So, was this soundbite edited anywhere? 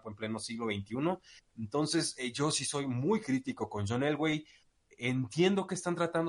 no; 0 cuts

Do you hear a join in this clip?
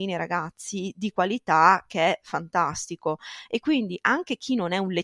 no; 0 cuts

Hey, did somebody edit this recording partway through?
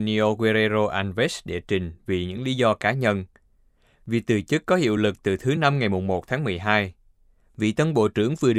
no; 0 cuts

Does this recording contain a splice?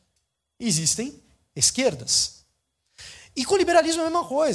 no; 0 cuts

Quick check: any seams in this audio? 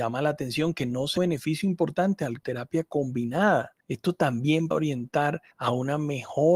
yes; 5 cuts; at 1.2 s, 2.4 s, 3.8 s, 4.7 s, 5.5 s

